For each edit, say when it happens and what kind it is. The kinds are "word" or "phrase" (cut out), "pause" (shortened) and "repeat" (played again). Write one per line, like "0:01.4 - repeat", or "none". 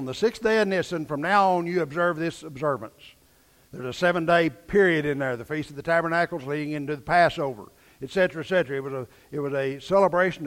none